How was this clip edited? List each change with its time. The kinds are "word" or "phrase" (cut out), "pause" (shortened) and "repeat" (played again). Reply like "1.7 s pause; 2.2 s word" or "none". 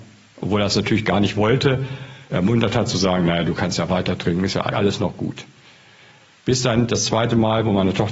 4.7 s word